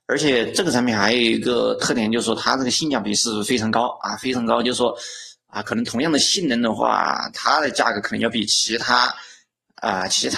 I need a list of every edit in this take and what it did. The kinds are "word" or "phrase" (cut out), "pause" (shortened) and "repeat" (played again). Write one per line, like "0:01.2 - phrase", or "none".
none